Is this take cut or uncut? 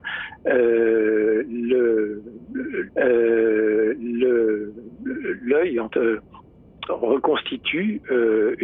cut